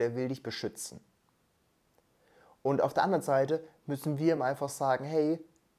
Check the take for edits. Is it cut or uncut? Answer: uncut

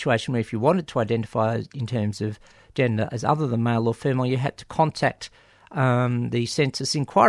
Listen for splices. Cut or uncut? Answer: uncut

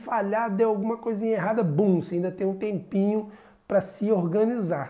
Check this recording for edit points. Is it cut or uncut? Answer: uncut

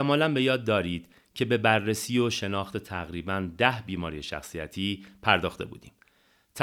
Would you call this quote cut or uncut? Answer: uncut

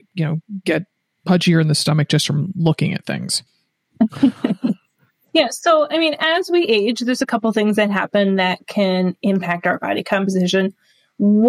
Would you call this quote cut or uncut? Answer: uncut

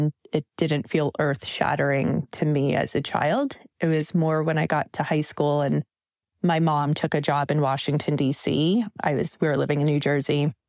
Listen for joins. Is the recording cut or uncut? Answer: uncut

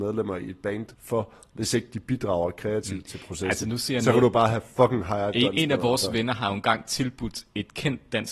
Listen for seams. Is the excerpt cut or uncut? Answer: cut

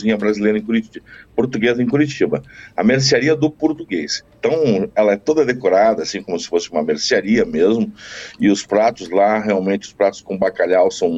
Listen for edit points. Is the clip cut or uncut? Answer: uncut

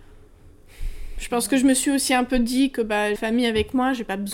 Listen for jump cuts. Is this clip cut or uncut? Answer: cut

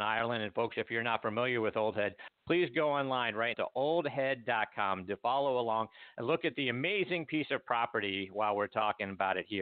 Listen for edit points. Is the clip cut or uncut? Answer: cut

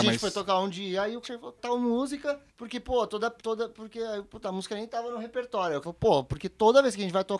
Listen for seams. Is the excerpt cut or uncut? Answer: cut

